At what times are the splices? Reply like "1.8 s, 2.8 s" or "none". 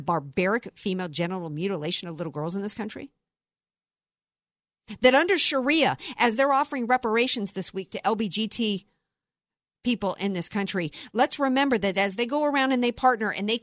none